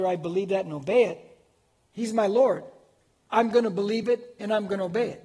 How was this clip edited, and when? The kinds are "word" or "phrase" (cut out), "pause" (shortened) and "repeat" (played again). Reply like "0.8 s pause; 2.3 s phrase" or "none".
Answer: none